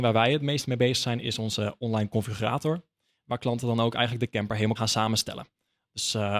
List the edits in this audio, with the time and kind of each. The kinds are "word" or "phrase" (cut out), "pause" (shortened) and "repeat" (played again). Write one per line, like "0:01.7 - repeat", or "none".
0:04.7 - word